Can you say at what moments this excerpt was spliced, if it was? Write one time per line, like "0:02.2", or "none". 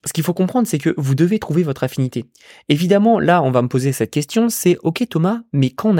none